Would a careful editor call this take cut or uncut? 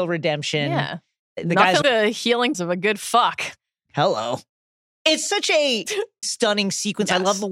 cut